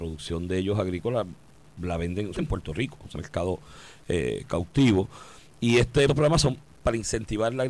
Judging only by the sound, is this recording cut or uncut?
cut